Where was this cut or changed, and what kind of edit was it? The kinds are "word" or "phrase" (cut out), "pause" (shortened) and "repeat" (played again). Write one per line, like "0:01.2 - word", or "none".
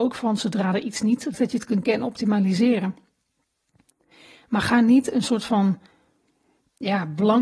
0:01.3 - word
0:01.8 - word